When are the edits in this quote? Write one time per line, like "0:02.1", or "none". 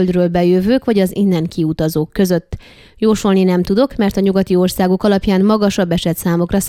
none